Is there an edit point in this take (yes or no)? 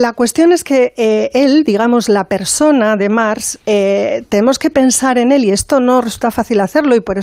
no